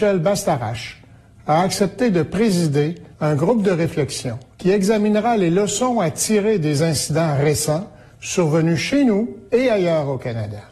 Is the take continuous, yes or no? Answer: no